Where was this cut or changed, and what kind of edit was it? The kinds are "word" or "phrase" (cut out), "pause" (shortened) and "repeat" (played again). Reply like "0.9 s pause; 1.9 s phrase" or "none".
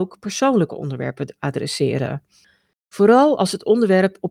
none